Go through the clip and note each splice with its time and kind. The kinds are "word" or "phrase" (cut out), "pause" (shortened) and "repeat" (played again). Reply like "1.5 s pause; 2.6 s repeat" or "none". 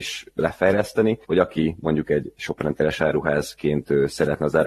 1.2 s pause